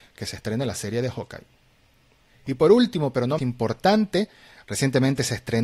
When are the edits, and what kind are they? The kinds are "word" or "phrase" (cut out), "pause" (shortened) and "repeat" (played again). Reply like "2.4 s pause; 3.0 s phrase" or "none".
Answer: 3.4 s word